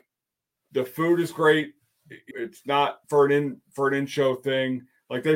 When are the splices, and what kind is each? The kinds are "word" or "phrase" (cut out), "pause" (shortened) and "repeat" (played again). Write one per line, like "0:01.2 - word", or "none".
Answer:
0:02.3 - word
0:03.0 - pause

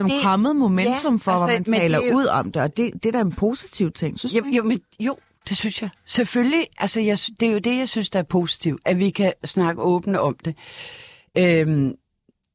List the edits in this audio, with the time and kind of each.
none

